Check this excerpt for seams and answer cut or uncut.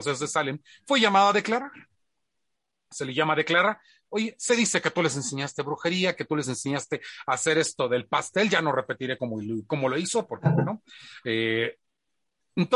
uncut